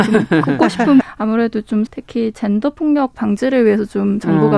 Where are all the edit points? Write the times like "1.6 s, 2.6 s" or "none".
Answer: 1.0 s, 1.9 s